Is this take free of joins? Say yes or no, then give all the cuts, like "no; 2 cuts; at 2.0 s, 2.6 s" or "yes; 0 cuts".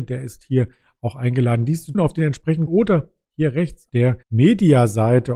no; 4 cuts; at 1.9 s, 2.7 s, 3.9 s, 4.2 s